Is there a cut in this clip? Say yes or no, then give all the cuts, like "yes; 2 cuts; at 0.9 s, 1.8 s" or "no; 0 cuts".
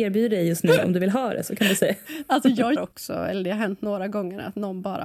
yes; 1 cut; at 2.8 s